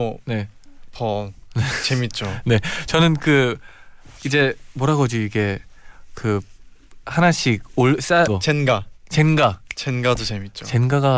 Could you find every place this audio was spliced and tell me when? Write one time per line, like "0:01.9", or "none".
0:08.3

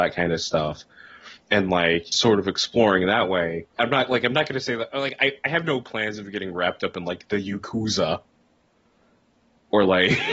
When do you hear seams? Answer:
0:01.4
0:02.1
0:03.7

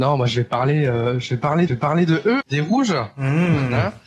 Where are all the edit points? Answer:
0:01.7
0:02.4

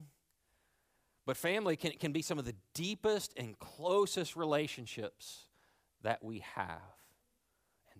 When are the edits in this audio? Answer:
none

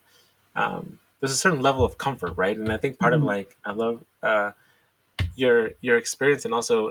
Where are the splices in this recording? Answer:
0:01.1

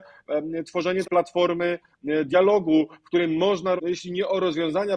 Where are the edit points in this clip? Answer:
0:01.0
0:03.8

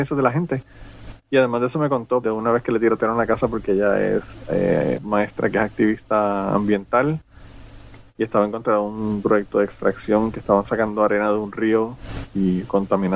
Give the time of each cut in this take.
0:02.2
0:05.0

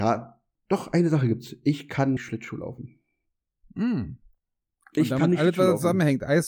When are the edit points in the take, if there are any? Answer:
0:02.2

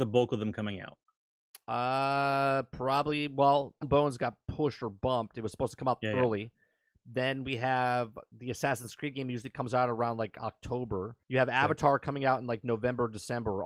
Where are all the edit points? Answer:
0:03.8
0:11.2

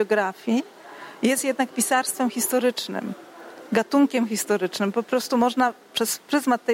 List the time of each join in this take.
none

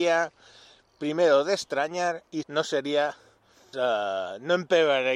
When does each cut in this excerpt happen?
0:02.4
0:03.7

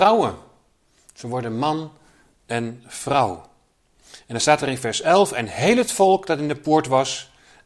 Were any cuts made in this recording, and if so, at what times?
none

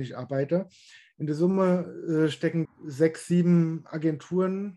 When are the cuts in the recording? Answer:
0:02.7

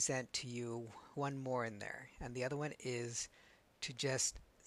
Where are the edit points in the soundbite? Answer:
0:01.1

